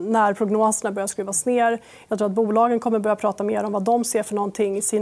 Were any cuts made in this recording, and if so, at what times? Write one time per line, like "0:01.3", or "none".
none

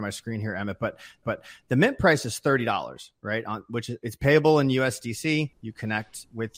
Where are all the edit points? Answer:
0:01.2
0:05.5

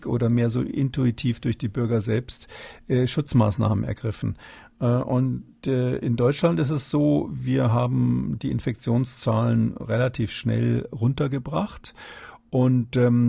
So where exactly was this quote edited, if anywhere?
none

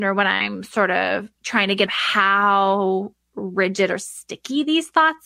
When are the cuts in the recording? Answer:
0:01.9

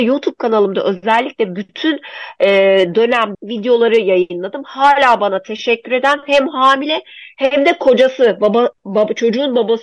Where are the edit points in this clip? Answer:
0:03.3

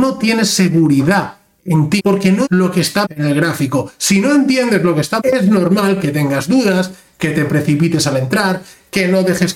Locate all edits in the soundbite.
0:02.0
0:02.4
0:03.0
0:05.2

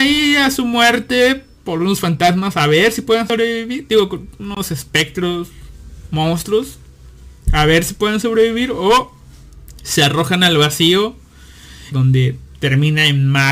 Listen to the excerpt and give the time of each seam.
0:11.9

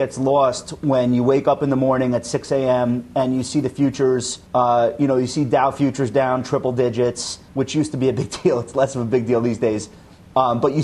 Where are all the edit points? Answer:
0:04.5
0:07.5

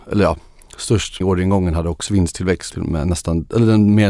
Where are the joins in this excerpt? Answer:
0:01.2
0:02.1
0:02.7

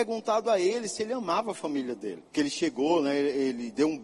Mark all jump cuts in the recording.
0:02.3

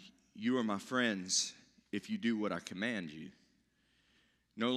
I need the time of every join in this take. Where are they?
none

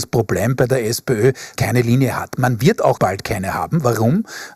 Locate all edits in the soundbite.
0:01.6
0:03.0

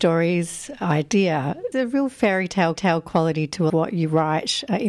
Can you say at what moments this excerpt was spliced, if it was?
0:01.7
0:02.8
0:03.7

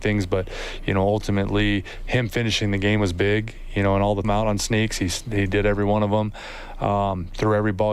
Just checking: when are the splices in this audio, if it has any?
0:04.2

